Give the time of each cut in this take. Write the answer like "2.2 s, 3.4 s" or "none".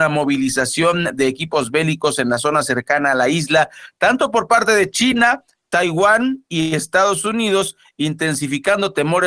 none